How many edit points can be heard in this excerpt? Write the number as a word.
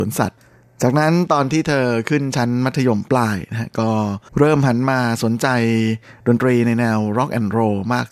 one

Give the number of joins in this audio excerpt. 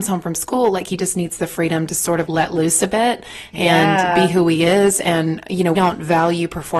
two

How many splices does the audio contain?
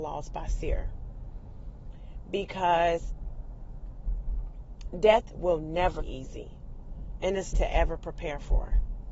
two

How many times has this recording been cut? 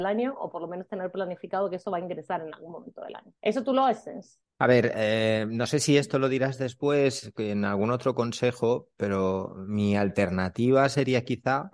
two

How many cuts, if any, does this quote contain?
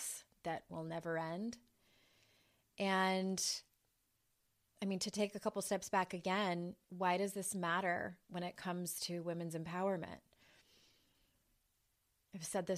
one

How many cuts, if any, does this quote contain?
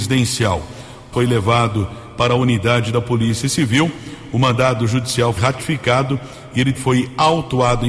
three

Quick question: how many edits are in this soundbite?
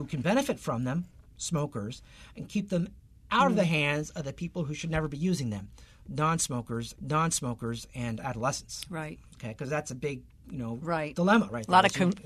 one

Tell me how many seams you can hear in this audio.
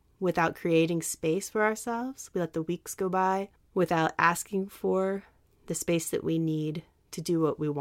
one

